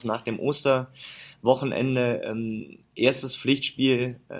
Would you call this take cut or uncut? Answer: uncut